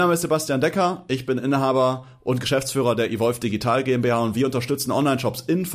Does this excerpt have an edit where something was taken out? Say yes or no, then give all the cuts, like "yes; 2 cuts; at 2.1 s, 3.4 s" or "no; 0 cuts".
no; 0 cuts